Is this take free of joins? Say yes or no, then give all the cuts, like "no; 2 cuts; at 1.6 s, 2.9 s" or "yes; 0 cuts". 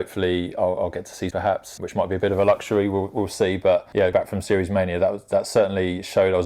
no; 3 cuts; at 1.3 s, 1.8 s, 4.1 s